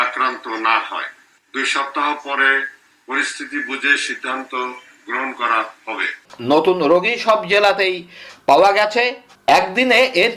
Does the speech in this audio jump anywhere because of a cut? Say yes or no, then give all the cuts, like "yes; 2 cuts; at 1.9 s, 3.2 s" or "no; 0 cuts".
no; 0 cuts